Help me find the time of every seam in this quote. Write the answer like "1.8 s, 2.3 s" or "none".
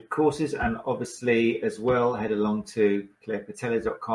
3.2 s

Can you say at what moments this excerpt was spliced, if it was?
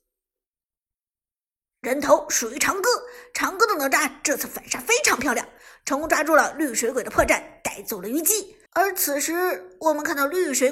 8.7 s

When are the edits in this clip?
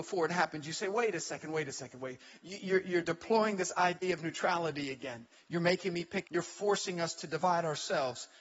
6.3 s

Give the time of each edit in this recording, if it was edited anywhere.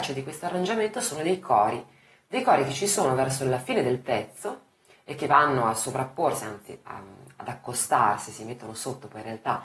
6.8 s

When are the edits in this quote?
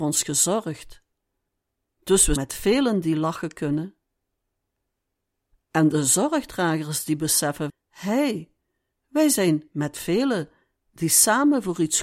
2.4 s, 7.7 s

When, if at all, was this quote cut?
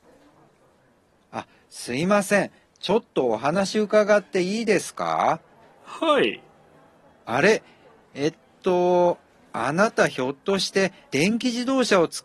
none

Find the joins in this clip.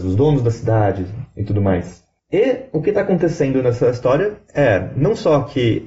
2.2 s

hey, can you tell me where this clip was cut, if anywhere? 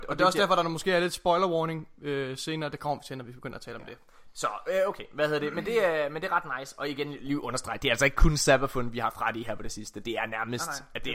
none

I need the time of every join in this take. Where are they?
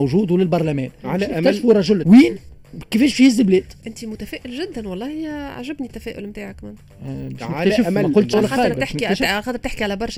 2.0 s, 8.3 s

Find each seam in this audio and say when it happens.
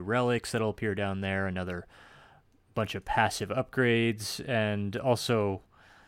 none

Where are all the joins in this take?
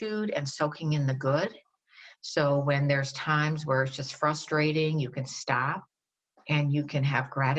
none

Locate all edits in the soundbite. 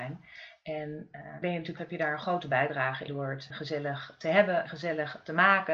1.4 s, 1.8 s, 3.1 s, 3.5 s, 4.7 s

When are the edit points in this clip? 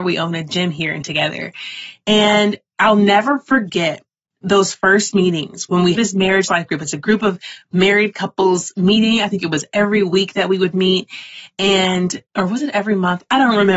1.0 s, 5.9 s, 12.3 s

